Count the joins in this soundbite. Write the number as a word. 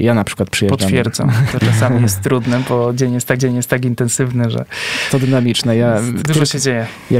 four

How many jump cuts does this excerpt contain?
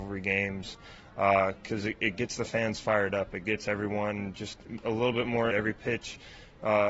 one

